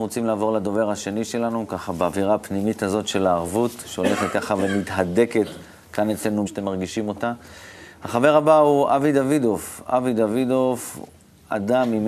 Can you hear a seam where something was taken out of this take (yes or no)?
yes